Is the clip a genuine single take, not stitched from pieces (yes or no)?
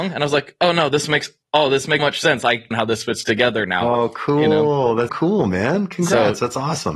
no